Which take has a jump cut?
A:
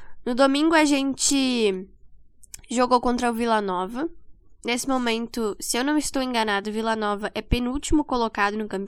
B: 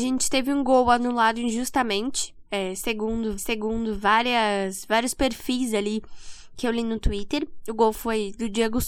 B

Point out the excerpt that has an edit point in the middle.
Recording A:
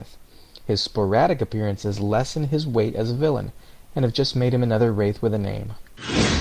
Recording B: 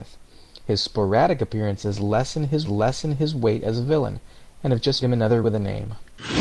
B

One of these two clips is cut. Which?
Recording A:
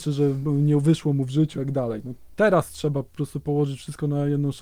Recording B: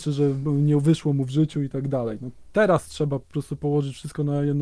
A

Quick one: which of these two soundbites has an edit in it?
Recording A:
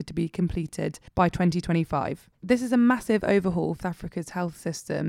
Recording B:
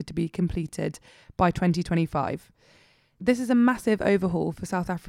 A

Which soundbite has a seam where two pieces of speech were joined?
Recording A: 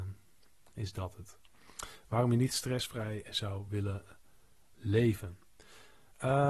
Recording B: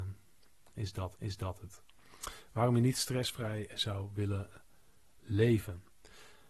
B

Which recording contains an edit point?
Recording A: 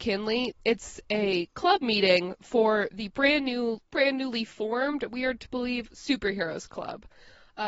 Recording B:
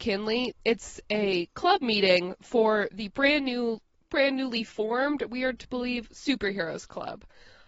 A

